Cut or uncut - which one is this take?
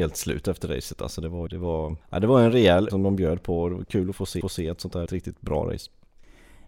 cut